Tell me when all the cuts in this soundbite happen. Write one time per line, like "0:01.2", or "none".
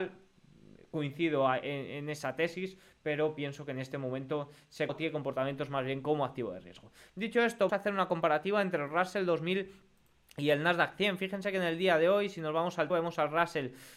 0:04.9
0:07.7
0:12.9